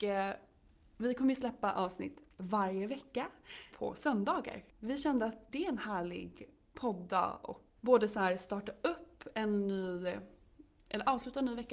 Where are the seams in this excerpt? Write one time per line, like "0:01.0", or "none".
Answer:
0:03.7
0:04.7
0:07.8